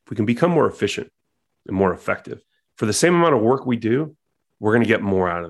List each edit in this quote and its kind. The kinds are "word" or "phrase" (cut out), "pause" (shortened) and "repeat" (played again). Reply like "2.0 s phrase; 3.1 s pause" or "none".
none

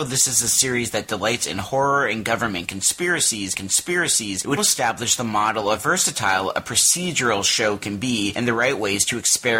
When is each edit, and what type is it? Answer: 3.5 s repeat; 4.6 s word; 5.8 s word

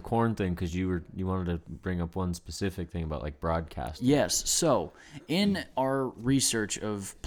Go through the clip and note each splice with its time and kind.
5.7 s pause

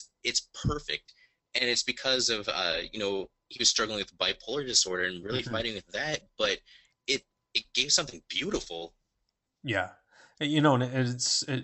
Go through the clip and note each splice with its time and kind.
none

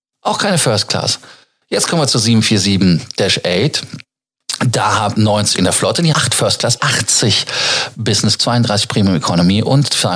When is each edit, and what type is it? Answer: 5.1 s word; 5.5 s word; 6.1 s word; 6.8 s word; 8.4 s word

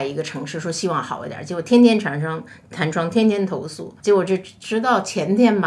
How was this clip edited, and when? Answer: 4.0 s pause

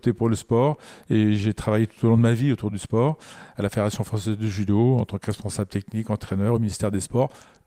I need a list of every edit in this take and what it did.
none

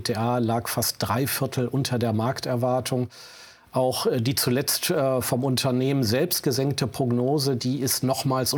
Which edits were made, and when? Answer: none

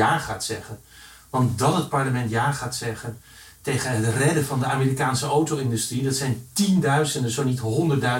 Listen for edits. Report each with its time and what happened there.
none

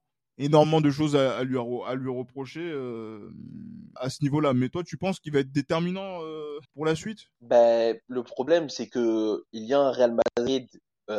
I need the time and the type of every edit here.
4.0 s word; 6.6 s pause; 7.3 s pause

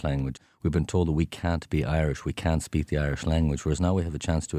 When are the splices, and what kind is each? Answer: none

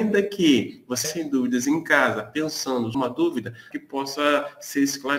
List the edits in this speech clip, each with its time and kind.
1.0 s word; 2.9 s word; 3.7 s phrase

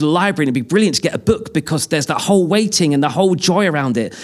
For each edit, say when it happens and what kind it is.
none

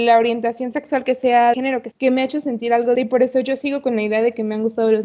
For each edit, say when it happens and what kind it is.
1.5 s word; 1.9 s word; 2.9 s word

